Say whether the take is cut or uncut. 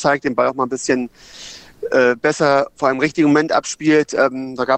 uncut